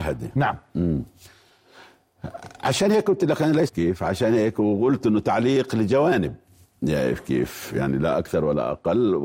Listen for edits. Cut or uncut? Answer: cut